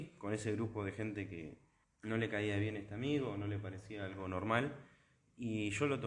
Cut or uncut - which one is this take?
cut